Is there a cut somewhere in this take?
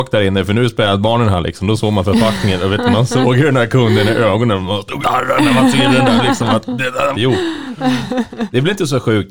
yes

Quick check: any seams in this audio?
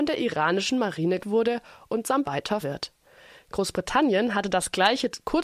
yes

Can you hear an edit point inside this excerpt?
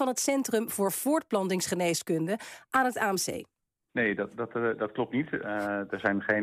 no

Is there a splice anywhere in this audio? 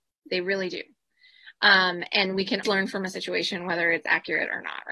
yes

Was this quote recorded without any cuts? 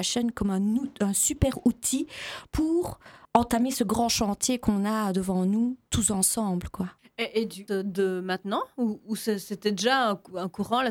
no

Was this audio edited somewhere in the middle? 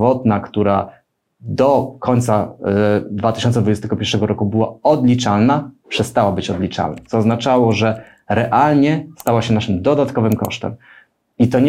no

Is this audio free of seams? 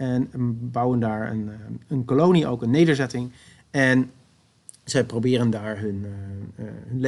yes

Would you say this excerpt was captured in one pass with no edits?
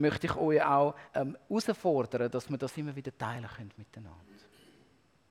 no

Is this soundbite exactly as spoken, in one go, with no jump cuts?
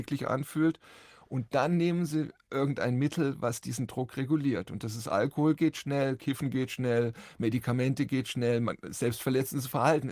yes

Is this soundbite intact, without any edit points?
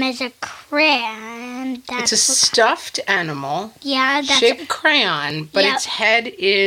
no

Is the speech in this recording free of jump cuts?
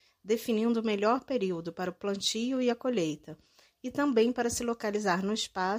yes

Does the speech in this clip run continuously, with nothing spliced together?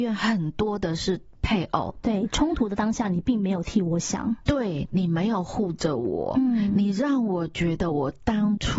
yes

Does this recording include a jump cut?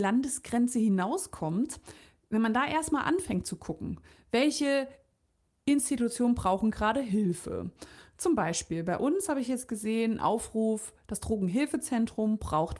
no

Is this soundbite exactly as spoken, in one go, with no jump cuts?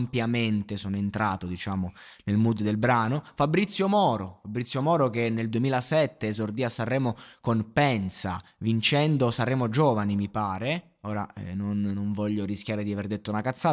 yes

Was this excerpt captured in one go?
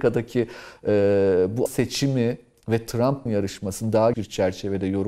no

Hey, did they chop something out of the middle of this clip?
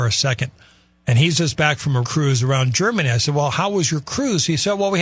yes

